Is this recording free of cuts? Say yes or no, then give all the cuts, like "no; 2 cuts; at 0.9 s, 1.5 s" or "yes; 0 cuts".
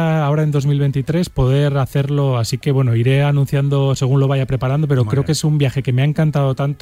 yes; 0 cuts